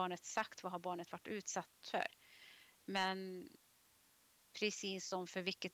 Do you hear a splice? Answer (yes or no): no